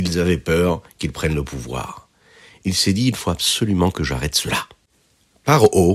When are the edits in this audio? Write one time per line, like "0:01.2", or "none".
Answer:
none